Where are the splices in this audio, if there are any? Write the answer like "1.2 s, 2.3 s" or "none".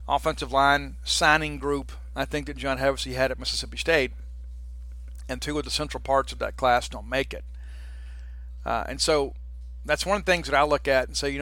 5.4 s